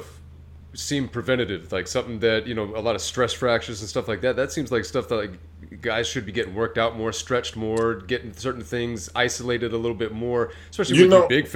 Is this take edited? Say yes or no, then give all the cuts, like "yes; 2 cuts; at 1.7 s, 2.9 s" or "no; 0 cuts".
no; 0 cuts